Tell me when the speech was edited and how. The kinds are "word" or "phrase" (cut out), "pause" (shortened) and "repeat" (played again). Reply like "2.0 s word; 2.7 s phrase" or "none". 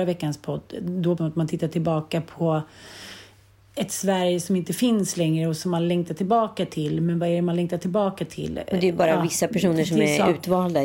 1.2 s word